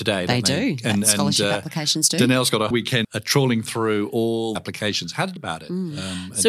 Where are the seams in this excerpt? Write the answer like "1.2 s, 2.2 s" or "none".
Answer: 2.7 s, 3.0 s, 4.6 s, 5.4 s

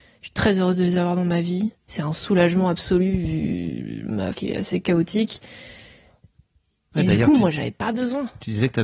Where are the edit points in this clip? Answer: 4.3 s

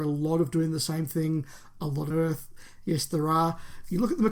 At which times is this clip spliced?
2.1 s

